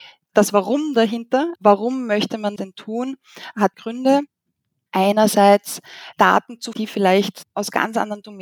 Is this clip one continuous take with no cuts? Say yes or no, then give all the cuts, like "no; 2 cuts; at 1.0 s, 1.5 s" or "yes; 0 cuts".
no; 5 cuts; at 1.6 s, 2.6 s, 3.7 s, 6.1 s, 6.7 s